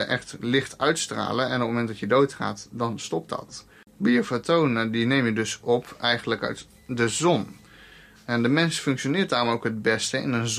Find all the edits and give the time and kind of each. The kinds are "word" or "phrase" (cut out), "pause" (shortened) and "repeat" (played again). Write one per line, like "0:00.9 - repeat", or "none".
none